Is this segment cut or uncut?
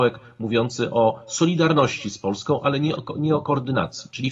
uncut